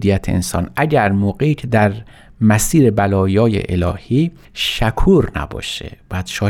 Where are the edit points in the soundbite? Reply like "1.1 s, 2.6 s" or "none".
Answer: none